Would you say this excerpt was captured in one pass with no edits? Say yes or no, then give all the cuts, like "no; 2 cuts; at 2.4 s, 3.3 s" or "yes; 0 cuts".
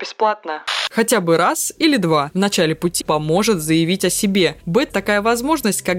no; 2 cuts; at 3.0 s, 4.9 s